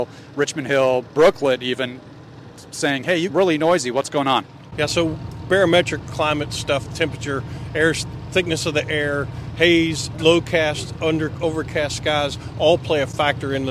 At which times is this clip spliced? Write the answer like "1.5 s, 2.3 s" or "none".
3.3 s, 6.0 s, 10.1 s